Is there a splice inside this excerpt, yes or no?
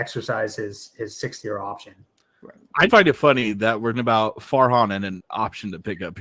yes